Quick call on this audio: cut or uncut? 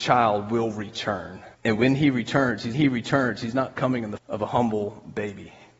cut